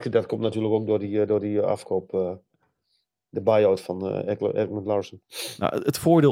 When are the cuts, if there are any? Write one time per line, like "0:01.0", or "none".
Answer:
0:03.8